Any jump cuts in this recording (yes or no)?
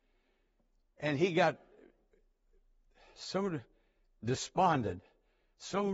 no